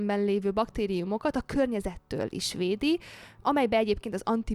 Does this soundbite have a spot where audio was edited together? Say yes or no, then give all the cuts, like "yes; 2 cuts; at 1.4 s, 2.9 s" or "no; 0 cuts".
no; 0 cuts